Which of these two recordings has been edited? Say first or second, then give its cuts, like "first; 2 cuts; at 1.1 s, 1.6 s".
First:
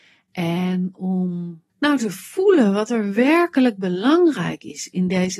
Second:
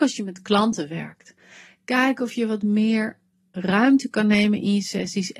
first; 1 cut; at 1.7 s